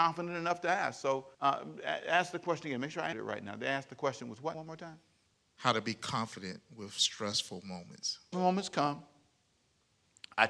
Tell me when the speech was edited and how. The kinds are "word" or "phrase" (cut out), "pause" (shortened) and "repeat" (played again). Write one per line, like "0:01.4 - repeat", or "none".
0:01.3 - pause
0:03.1 - word
0:04.5 - word
0:05.3 - pause
0:08.3 - word